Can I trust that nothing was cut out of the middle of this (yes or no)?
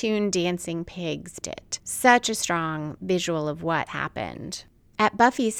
no